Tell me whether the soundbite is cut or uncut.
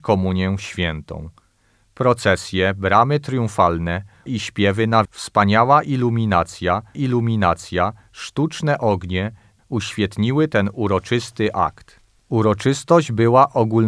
cut